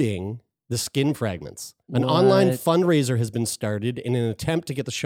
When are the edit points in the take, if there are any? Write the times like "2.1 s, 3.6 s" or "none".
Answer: 1.8 s